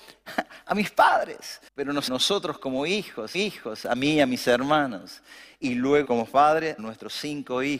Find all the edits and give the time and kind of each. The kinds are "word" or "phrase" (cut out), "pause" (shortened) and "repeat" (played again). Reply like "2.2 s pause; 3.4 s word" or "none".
1.7 s pause; 2.1 s phrase; 3.3 s repeat; 6.0 s word; 6.8 s word